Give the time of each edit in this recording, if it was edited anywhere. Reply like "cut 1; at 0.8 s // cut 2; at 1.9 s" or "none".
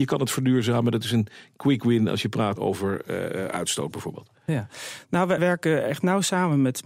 cut 1; at 2.6 s // cut 2; at 5.4 s